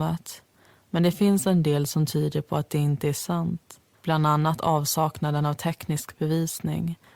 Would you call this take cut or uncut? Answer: cut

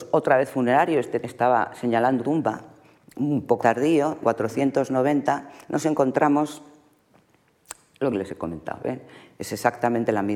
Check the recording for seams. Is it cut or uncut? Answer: cut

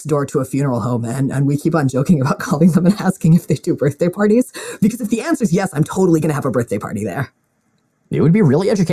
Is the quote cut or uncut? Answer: uncut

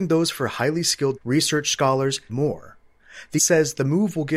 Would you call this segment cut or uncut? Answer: cut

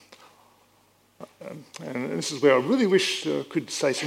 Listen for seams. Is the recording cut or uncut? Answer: uncut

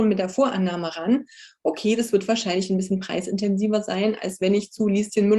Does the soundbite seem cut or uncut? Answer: uncut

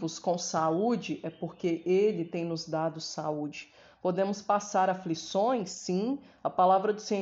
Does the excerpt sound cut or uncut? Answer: uncut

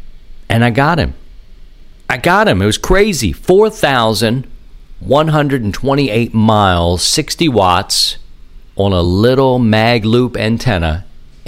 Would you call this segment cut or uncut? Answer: uncut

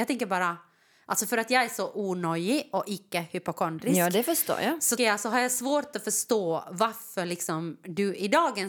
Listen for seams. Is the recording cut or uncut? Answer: cut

